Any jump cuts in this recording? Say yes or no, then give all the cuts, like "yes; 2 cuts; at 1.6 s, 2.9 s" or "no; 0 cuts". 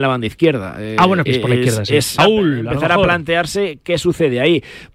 yes; 2 cuts; at 1.3 s, 2.2 s